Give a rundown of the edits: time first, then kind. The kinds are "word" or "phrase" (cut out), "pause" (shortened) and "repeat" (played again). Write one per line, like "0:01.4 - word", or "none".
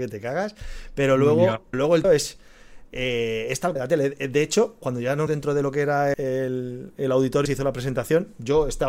0:01.7 - word
0:02.0 - word
0:03.8 - word
0:04.8 - word
0:05.3 - word
0:06.1 - word
0:07.5 - word